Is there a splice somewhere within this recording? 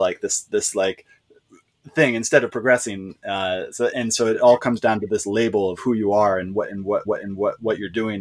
yes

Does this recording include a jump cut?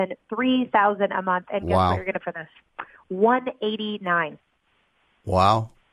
yes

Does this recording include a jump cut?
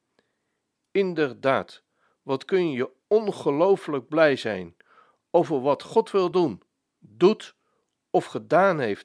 no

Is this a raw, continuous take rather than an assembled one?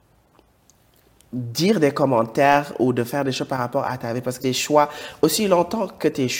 no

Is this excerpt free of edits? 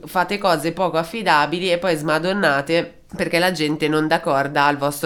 yes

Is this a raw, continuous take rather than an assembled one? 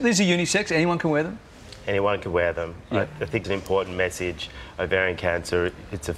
no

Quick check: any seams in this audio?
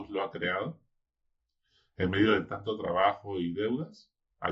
no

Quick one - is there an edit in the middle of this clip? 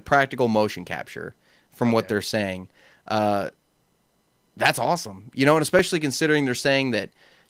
no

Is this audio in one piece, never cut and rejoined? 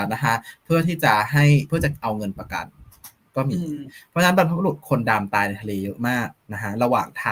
yes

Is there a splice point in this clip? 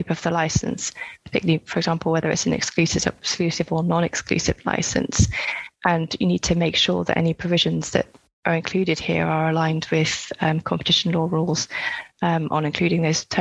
no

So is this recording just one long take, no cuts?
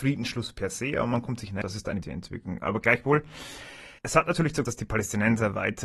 no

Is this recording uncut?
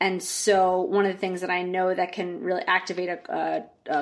yes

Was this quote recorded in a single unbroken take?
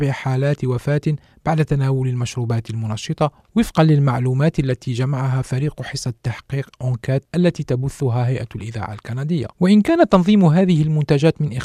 yes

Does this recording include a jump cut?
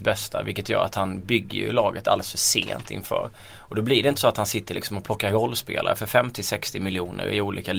no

